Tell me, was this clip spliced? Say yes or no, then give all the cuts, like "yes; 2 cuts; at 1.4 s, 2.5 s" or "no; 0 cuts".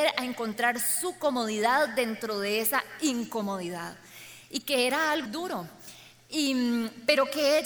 yes; 1 cut; at 5.3 s